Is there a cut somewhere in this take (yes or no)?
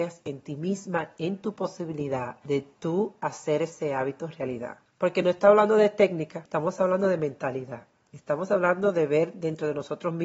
no